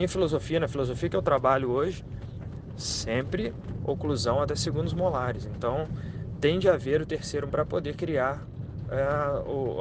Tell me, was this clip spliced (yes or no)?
yes